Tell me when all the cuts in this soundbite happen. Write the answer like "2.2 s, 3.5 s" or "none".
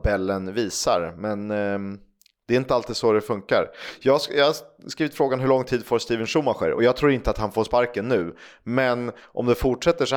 none